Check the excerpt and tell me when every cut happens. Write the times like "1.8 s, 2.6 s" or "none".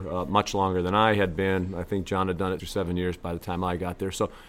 2.6 s